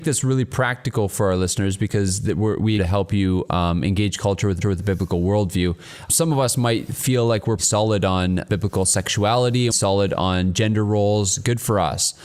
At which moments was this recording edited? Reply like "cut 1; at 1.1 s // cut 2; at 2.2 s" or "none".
cut 1; at 2.8 s // cut 2; at 4.6 s // cut 3; at 7.6 s // cut 4; at 9.7 s